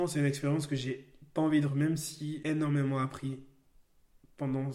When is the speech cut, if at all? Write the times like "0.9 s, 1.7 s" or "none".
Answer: 1.7 s, 2.4 s